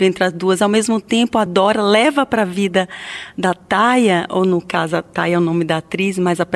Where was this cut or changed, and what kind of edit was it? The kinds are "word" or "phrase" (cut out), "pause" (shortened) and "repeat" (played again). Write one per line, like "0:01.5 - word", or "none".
none